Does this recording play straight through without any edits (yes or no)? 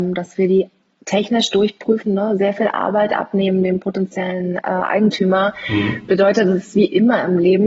yes